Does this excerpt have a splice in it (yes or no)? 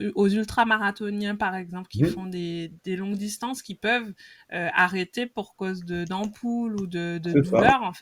no